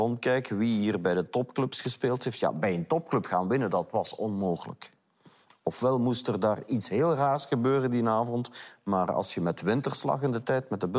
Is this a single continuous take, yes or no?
yes